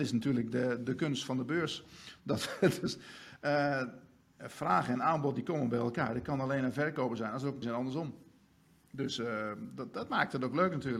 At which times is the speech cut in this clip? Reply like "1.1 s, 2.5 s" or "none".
7.6 s